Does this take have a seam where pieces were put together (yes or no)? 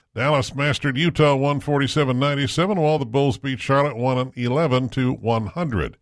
no